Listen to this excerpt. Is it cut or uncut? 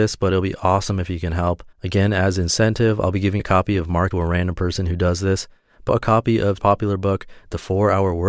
cut